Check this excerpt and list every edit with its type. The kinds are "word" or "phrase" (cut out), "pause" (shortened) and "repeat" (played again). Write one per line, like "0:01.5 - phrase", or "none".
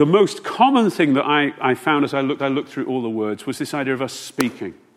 0:02.4 - repeat